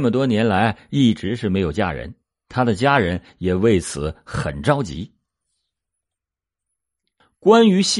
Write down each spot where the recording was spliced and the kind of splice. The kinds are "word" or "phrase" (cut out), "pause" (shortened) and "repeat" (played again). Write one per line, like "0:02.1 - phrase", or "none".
none